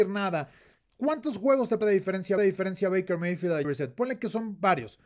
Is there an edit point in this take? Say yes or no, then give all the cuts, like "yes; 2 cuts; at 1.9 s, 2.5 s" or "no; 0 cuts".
yes; 3 cuts; at 1.8 s, 2.4 s, 3.6 s